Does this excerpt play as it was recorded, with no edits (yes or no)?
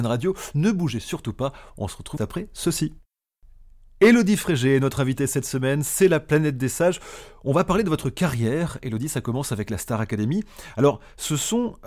no